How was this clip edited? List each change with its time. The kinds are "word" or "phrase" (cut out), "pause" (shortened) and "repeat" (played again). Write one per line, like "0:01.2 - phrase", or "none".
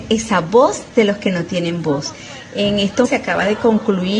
0:03.1 - word